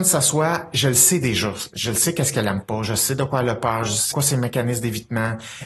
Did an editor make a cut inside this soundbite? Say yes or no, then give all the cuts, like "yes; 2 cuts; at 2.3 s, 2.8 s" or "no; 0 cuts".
yes; 1 cut; at 4.1 s